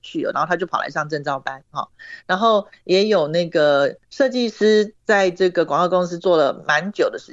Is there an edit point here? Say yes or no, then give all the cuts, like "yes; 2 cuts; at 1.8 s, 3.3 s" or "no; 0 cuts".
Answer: no; 0 cuts